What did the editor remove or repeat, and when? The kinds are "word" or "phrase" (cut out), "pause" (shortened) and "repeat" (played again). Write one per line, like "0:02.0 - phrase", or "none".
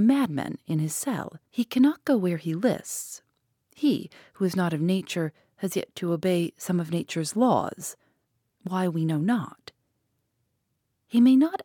0:01.5 - pause